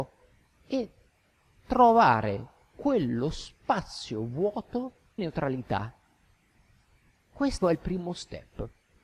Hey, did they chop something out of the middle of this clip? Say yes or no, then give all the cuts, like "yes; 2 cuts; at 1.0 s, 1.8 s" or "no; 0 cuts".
yes; 2 cuts; at 5.2 s, 7.6 s